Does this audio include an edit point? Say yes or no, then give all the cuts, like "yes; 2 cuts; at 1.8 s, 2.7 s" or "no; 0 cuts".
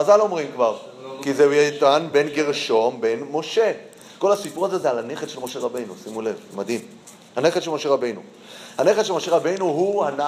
no; 0 cuts